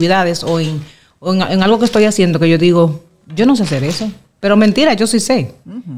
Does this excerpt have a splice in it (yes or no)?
no